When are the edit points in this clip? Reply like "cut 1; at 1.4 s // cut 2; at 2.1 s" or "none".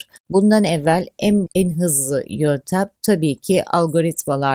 cut 1; at 1.5 s // cut 2; at 3.0 s